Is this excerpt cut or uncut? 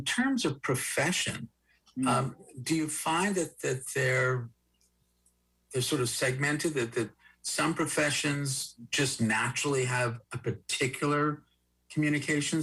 uncut